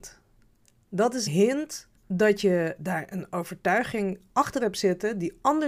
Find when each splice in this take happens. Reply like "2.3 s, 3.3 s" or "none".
1.3 s, 2.0 s, 2.8 s, 4.3 s